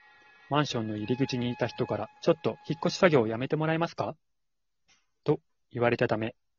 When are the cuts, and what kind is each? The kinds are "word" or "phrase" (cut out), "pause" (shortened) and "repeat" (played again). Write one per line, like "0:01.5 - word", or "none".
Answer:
0:02.2 - pause
0:02.6 - pause